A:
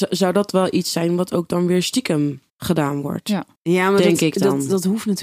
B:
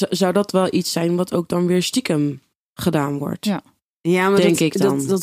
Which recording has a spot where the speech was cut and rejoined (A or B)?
A